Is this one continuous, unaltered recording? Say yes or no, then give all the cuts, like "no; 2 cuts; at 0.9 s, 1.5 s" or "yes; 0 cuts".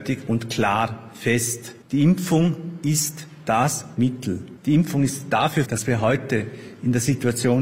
no; 2 cuts; at 4.0 s, 5.6 s